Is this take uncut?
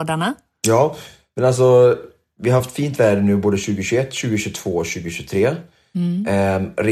yes; 0 cuts

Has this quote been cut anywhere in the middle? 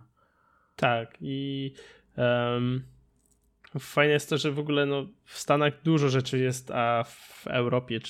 no; 0 cuts

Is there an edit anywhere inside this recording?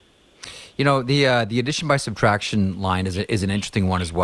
no; 0 cuts

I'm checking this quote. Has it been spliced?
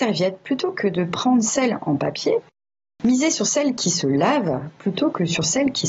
no; 0 cuts

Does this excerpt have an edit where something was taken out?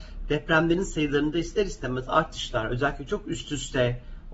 no; 0 cuts

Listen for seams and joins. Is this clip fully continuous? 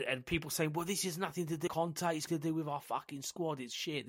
no; 2 cuts; at 1.7 s, 2.3 s

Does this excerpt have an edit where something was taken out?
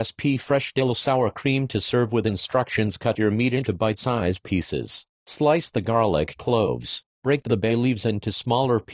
no; 0 cuts

